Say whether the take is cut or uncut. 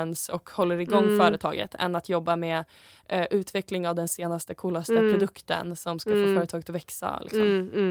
uncut